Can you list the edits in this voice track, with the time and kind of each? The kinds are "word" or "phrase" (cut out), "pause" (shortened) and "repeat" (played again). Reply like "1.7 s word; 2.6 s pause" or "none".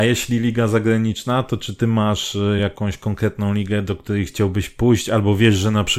none